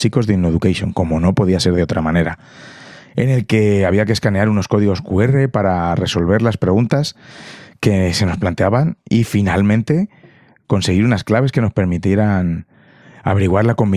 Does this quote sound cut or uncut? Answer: uncut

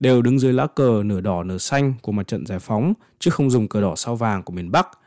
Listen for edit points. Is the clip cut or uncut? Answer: uncut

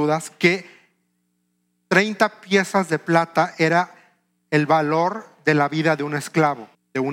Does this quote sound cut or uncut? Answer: uncut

